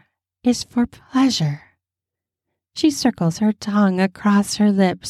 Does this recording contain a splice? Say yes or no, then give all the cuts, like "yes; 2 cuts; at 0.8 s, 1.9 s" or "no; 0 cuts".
no; 0 cuts